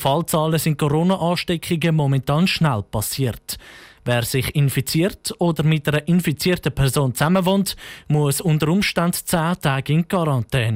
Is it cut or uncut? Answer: uncut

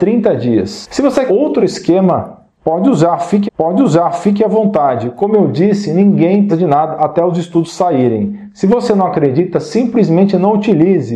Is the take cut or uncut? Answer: cut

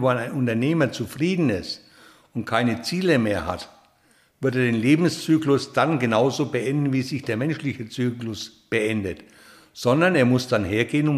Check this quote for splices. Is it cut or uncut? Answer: uncut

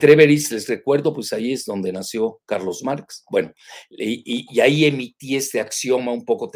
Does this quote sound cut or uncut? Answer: uncut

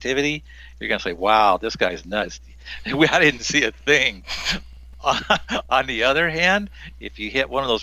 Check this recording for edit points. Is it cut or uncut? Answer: uncut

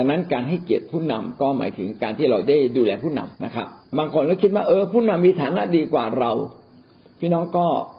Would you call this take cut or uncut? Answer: cut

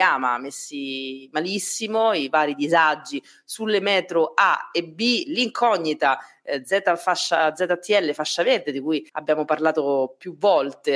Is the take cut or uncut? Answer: cut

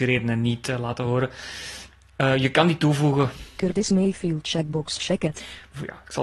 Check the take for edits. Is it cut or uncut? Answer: uncut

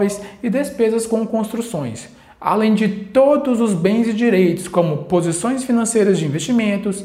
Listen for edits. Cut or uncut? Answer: uncut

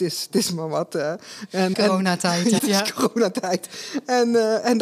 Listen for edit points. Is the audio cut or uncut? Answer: cut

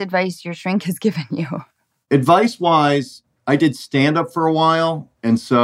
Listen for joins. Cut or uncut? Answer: cut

